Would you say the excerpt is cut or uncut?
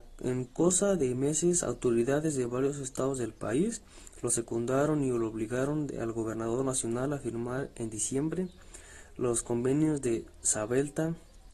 uncut